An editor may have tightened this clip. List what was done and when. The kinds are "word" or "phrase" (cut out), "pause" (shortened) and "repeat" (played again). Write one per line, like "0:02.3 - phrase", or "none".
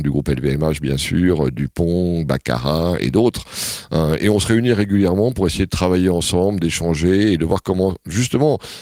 none

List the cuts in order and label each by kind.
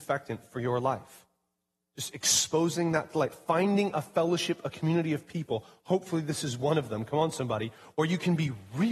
none

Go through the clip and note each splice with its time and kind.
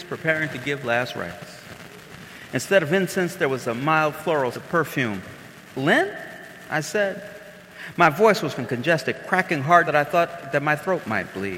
0:04.5 - word
0:08.6 - word
0:09.8 - word

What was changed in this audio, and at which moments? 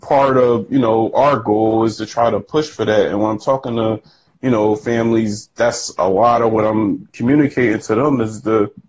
none

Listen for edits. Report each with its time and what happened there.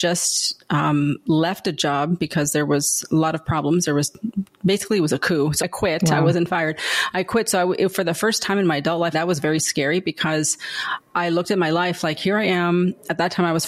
0:05.6 - word
0:09.1 - phrase

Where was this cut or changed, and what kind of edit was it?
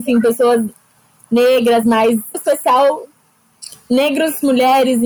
0:01.8 - word
0:02.3 - word

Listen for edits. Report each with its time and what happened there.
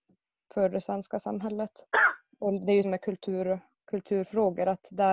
0:02.8 - word

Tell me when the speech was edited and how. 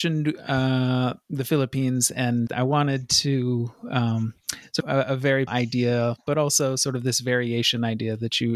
0:02.5 - word
0:04.8 - phrase
0:05.5 - word

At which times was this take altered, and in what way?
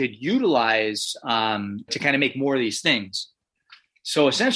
0:01.9 - word

